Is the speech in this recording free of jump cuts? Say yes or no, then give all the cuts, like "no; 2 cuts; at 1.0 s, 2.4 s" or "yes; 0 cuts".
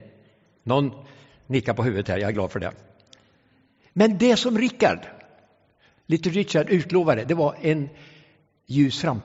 yes; 0 cuts